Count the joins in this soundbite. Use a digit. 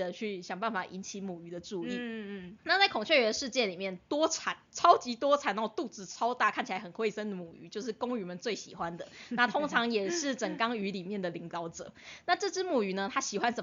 1